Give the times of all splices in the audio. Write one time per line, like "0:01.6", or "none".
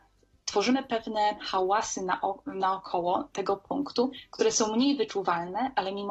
none